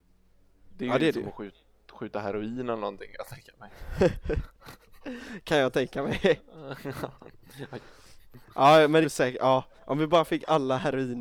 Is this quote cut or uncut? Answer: cut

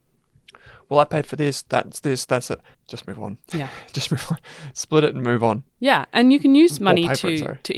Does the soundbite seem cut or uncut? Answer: cut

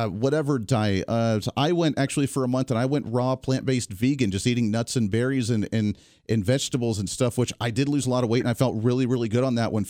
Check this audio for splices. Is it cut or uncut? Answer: uncut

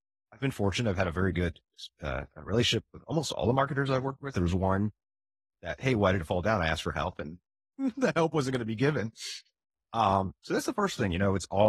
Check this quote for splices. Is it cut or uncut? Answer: uncut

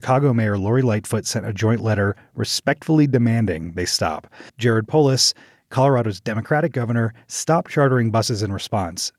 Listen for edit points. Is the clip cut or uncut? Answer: cut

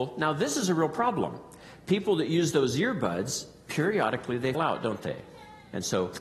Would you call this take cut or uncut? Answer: cut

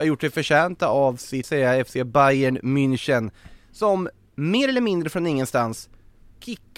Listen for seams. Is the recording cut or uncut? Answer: cut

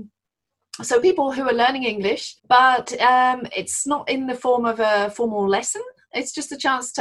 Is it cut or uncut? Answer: cut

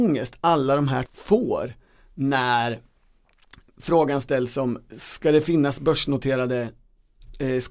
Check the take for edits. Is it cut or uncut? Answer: cut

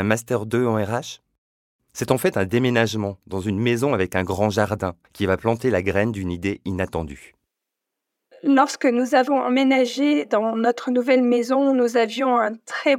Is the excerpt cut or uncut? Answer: cut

